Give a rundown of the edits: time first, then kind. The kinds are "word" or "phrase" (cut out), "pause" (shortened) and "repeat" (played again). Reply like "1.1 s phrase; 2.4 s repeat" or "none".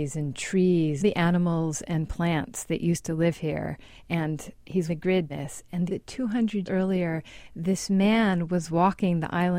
1.0 s phrase; 4.9 s word; 5.3 s word; 5.9 s phrase; 6.7 s word

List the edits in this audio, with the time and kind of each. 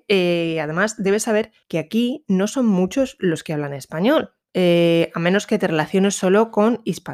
1.6 s pause; 4.4 s pause

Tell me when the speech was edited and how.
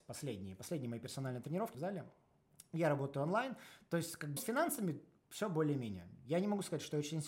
1.7 s word; 4.4 s word

